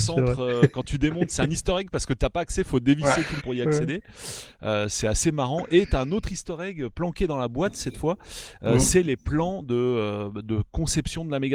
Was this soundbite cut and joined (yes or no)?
yes